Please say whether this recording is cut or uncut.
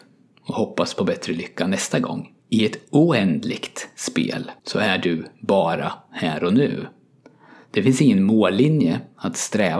cut